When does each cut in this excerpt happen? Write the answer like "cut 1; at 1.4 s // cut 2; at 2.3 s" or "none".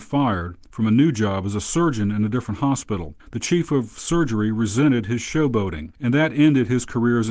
cut 1; at 3.2 s